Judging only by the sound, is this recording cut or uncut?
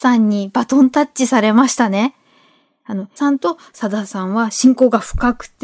cut